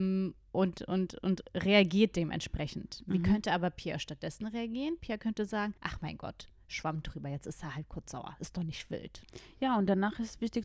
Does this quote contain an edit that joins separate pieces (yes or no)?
yes